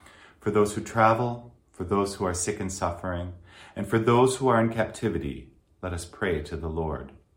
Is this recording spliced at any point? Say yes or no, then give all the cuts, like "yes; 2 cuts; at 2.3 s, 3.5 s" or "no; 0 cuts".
no; 0 cuts